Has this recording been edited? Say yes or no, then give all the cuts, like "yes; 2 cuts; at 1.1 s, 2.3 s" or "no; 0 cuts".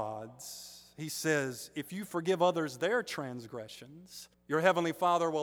yes; 1 cut; at 4.3 s